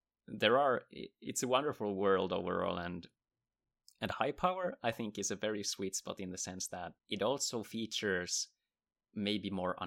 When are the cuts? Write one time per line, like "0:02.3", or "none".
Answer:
0:07.0